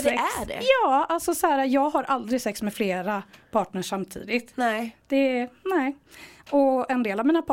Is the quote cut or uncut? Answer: uncut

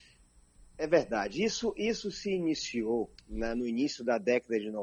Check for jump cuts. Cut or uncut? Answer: cut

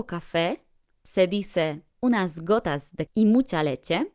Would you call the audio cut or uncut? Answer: cut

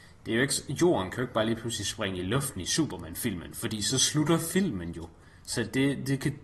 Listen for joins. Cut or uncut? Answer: uncut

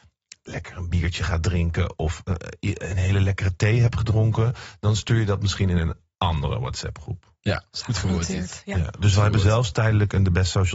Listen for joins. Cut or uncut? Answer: uncut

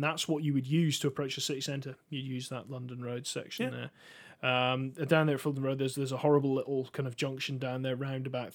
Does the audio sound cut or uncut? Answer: uncut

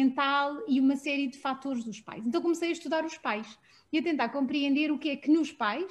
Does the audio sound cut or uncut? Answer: uncut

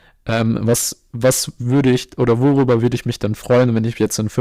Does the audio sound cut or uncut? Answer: uncut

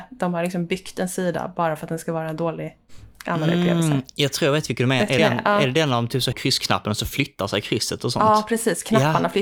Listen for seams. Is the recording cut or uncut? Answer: cut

